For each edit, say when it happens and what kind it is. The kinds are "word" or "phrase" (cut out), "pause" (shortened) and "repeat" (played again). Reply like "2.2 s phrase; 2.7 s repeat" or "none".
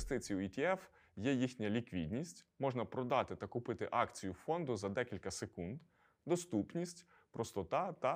none